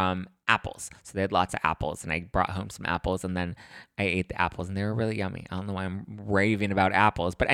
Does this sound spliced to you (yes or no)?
no